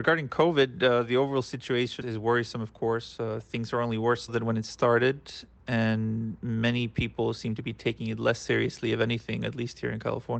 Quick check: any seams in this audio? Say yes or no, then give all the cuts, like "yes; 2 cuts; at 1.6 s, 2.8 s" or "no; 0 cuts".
yes; 2 cuts; at 2.0 s, 4.3 s